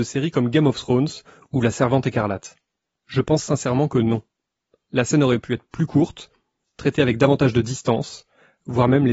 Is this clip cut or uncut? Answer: uncut